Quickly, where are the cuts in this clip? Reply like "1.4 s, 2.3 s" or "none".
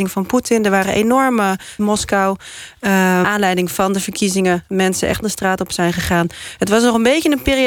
1.8 s, 3.2 s, 5.2 s